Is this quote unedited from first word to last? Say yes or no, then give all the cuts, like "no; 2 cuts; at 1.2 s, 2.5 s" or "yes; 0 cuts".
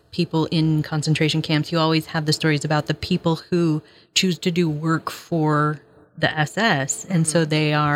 yes; 0 cuts